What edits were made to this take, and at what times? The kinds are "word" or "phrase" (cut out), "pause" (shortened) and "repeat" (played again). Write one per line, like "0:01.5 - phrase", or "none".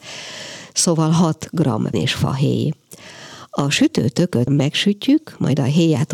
0:01.9 - word
0:04.5 - word